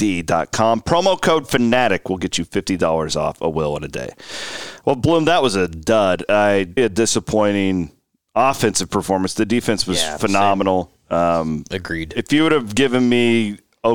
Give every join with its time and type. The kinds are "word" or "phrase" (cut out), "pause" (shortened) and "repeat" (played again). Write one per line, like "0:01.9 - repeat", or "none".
0:06.8 - word